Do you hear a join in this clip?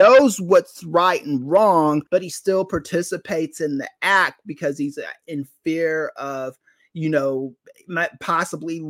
yes; 1 cut; at 2.1 s

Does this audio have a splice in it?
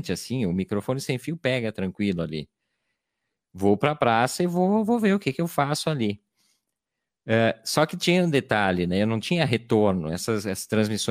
no; 0 cuts

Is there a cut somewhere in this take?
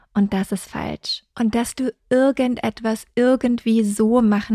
yes; 1 cut; at 1.3 s

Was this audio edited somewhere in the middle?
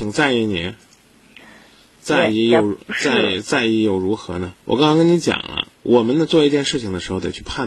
yes; 2 cuts; at 4.6 s, 5.7 s

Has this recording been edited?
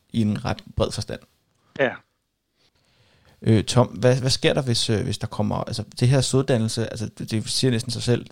no; 0 cuts

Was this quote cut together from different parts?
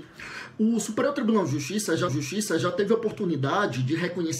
yes; 1 cut; at 2.1 s

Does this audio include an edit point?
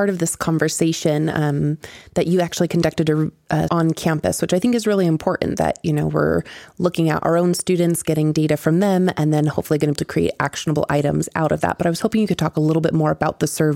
yes; 2 cuts; at 3.7 s, 10.0 s

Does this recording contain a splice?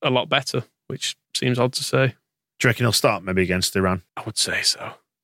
yes; 2 cuts; at 1.2 s, 4.1 s

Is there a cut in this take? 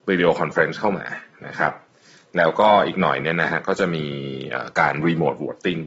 no; 0 cuts

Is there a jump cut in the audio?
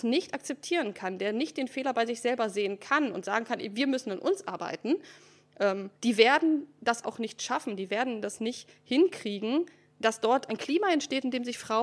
yes; 4 cuts; at 5.9 s, 7.0 s, 9.9 s, 10.5 s

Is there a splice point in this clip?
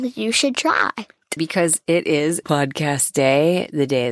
yes; 2 cuts; at 1.4 s, 2.4 s

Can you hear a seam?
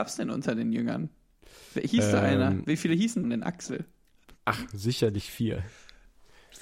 yes; 1 cut; at 3.2 s

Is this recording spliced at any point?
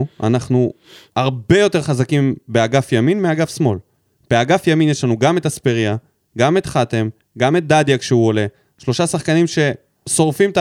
no; 0 cuts

